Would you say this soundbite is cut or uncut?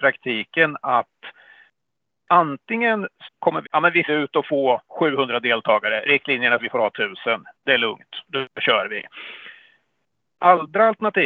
cut